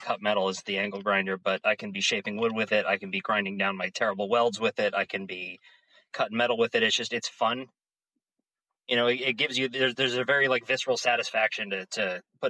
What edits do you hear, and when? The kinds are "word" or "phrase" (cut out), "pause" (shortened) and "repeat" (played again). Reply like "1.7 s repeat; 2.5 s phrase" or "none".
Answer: none